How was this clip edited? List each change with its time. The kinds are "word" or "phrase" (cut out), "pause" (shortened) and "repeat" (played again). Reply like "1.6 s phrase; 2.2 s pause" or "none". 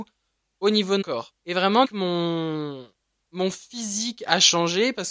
1.0 s word; 1.4 s pause; 1.8 s word